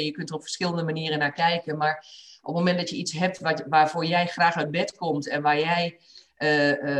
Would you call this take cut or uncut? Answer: uncut